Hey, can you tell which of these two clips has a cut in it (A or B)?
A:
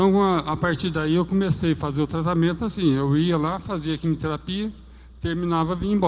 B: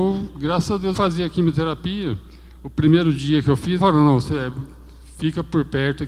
B